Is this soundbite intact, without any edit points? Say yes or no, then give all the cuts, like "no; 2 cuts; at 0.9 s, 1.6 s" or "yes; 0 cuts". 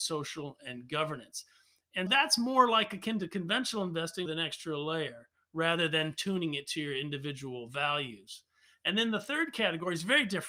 no; 2 cuts; at 2.1 s, 4.3 s